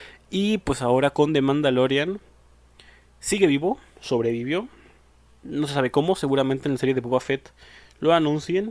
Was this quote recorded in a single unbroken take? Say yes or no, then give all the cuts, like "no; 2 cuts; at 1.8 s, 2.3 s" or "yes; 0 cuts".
yes; 0 cuts